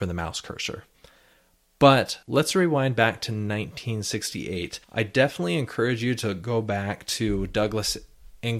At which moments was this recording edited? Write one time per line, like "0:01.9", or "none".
0:02.2
0:04.8